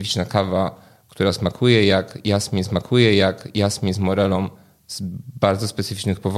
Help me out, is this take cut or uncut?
cut